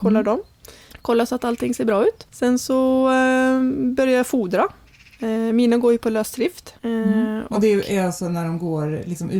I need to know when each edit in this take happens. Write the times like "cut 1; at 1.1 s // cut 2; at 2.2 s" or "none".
cut 1; at 2.3 s // cut 2; at 6.8 s